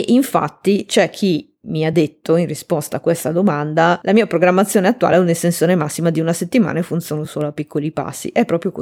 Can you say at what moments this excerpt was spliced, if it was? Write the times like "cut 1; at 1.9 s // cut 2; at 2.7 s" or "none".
none